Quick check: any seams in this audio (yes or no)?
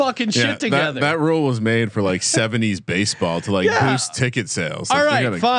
no